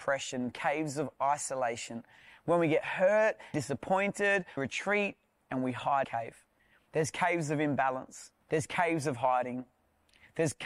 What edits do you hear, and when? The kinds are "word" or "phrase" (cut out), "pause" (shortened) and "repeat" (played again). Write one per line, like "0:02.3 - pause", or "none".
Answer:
0:03.5 - word
0:04.6 - word
0:06.0 - phrase
0:08.4 - pause